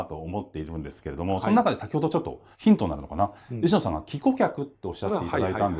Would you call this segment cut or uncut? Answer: cut